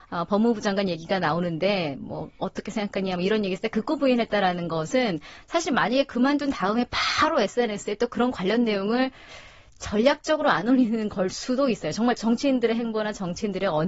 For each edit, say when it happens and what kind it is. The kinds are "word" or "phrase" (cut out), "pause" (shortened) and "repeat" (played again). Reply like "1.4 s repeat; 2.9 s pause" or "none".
none